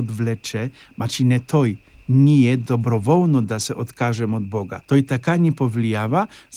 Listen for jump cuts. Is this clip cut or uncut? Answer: cut